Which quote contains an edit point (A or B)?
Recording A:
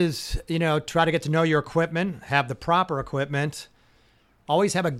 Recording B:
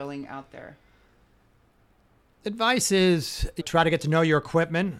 B